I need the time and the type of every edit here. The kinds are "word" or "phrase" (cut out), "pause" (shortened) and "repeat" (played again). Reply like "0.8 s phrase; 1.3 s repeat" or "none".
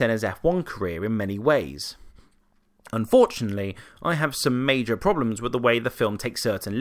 none